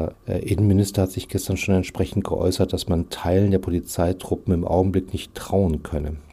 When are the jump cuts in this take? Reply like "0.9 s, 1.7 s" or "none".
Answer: none